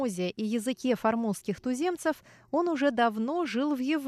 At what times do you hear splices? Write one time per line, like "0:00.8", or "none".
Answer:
none